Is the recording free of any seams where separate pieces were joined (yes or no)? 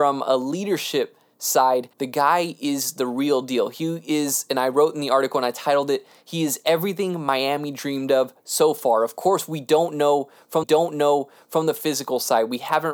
no